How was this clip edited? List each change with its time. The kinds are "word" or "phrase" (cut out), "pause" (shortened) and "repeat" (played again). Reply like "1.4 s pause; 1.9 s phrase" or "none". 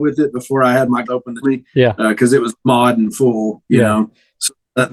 1.0 s word; 1.4 s phrase; 2.6 s pause